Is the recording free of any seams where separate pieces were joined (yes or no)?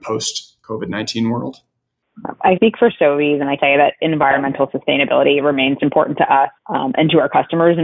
no